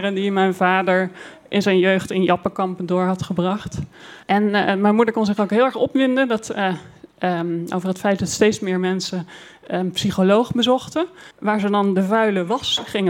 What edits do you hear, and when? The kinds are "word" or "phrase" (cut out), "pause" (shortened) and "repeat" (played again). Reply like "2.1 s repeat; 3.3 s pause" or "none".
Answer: 4.2 s pause; 11.3 s pause